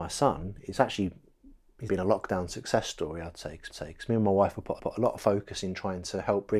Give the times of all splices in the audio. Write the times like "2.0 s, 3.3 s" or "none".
1.9 s, 3.7 s, 4.8 s